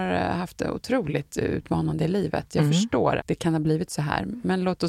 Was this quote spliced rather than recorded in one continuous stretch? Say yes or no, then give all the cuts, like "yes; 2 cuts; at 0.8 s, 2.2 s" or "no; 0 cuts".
yes; 1 cut; at 3.2 s